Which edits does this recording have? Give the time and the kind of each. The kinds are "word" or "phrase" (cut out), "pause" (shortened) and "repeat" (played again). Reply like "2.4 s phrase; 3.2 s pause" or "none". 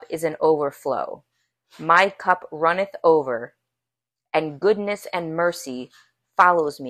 none

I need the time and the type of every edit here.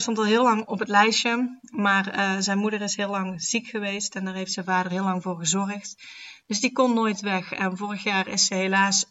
none

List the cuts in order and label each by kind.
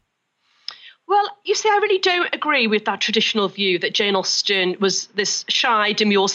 none

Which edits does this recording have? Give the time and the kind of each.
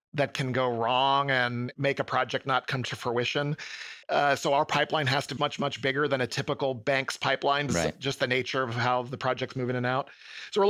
4.0 s pause; 5.4 s word; 7.7 s word

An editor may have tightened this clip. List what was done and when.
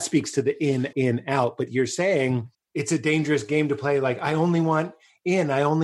0.9 s word; 2.5 s pause

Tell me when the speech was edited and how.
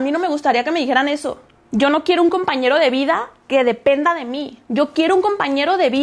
1.6 s pause; 4.6 s pause

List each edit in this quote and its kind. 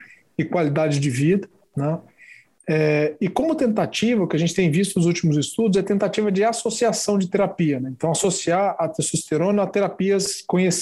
none

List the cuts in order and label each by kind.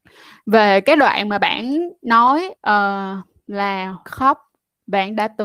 2.6 s pause; 4.1 s phrase

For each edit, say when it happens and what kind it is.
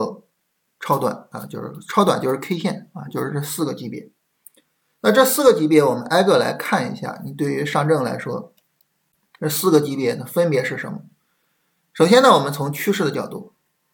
none

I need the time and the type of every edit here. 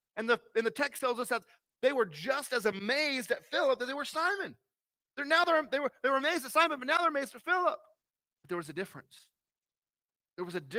none

